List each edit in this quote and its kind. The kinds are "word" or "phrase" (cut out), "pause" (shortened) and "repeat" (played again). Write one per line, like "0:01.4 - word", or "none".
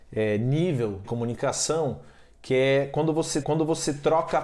0:01.0 - word
0:03.4 - repeat